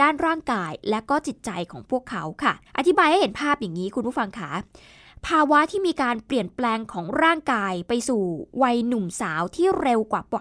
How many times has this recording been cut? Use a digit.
1